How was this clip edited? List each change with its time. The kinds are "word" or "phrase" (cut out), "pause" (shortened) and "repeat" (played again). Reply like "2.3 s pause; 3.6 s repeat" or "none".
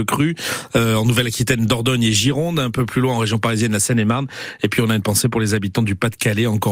none